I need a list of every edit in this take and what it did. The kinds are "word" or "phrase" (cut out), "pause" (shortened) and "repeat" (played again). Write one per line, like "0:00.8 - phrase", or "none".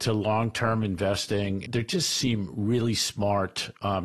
0:01.7 - word